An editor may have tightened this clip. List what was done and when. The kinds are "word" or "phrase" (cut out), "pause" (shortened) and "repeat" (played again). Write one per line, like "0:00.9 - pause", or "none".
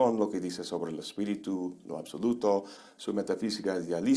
none